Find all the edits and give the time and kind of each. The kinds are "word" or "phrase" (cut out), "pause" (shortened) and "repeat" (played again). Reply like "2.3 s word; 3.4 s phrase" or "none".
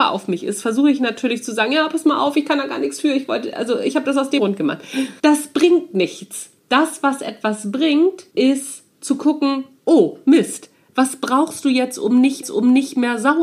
4.4 s phrase; 5.2 s pause; 6.6 s pause; 8.3 s pause; 12.4 s repeat